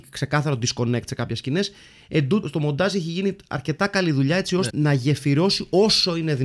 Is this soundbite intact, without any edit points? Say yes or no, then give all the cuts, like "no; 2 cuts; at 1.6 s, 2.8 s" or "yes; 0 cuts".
no; 2 cuts; at 2.4 s, 4.7 s